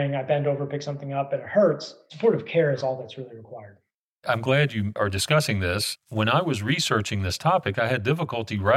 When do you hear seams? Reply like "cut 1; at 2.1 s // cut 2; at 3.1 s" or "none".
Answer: none

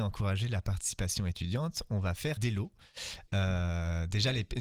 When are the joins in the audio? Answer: cut 1; at 2.4 s

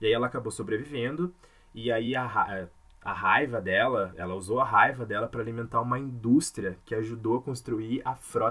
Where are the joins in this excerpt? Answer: none

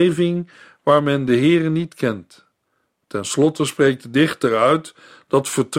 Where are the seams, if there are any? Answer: none

